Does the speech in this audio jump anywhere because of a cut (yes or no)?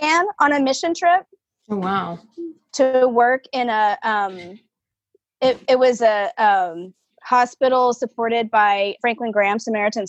yes